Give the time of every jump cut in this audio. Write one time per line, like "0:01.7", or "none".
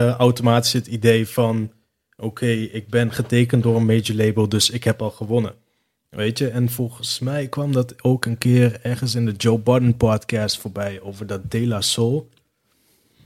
none